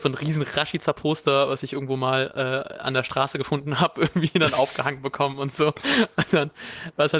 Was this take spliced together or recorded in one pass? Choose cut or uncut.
uncut